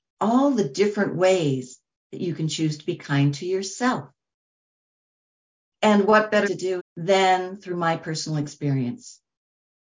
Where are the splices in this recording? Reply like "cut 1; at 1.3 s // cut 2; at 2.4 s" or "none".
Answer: cut 1; at 6.4 s // cut 2; at 6.8 s